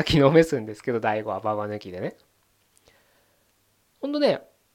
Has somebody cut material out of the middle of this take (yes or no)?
no